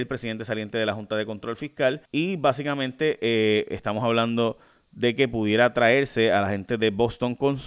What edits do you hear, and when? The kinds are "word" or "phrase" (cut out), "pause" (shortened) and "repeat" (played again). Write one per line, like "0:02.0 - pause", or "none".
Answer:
0:02.1 - pause

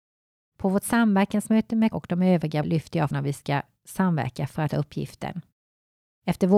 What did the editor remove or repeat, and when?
0:01.9 - word
0:02.6 - word
0:03.1 - word
0:04.7 - word

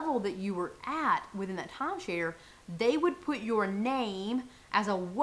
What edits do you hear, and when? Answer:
none

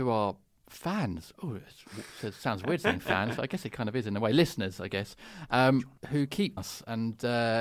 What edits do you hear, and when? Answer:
0:06.0 - pause
0:06.6 - word

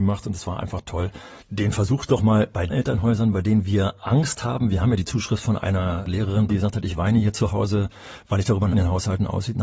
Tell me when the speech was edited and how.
0:01.4 - pause
0:02.7 - word
0:06.5 - word
0:08.7 - phrase

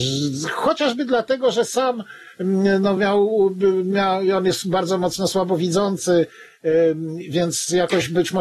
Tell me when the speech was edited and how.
none

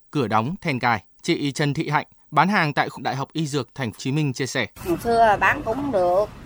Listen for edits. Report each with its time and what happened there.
0:01.1 - pause
0:03.0 - phrase
0:04.0 - word
0:04.7 - pause

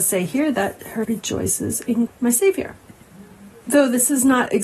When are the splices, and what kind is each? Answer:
0:01.0 - word
0:02.1 - word

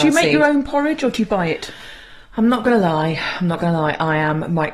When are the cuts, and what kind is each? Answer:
none

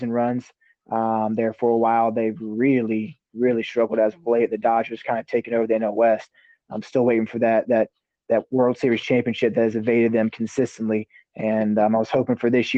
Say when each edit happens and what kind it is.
none

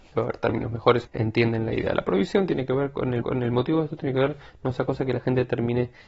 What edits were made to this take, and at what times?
0:01.1 - word
0:03.2 - repeat

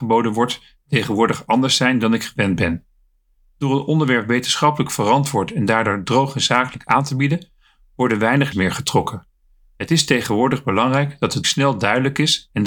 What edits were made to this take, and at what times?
0:08.5 - word
0:11.4 - word

